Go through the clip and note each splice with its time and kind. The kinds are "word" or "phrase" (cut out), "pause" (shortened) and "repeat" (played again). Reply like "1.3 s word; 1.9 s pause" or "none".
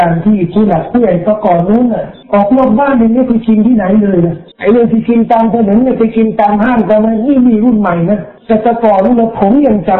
2.2 s pause; 4.5 s pause; 8.4 s pause